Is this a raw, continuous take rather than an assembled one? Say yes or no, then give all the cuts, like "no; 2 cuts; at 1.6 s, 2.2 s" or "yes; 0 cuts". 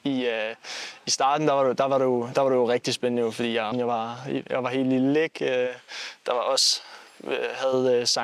no; 1 cut; at 3.7 s